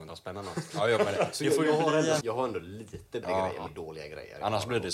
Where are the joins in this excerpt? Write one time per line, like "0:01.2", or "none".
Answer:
0:02.2
0:03.2
0:03.7